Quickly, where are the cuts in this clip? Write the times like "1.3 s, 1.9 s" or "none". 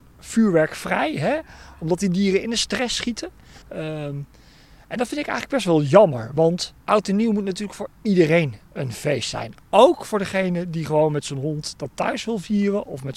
3.6 s, 6.8 s, 7.9 s